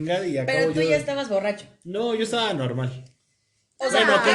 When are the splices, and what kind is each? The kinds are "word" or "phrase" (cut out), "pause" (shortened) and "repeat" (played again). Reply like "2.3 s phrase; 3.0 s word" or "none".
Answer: none